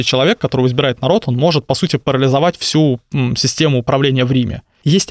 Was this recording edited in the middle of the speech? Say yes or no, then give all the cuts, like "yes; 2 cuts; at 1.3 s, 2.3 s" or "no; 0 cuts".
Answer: no; 0 cuts